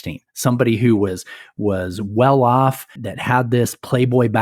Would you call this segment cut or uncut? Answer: cut